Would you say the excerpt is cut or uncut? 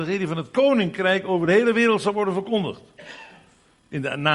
uncut